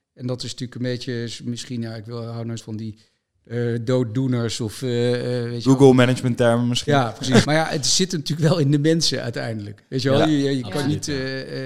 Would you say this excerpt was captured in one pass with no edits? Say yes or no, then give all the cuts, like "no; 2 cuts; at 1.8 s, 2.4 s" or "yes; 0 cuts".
no; 2 cuts; at 2.6 s, 7.4 s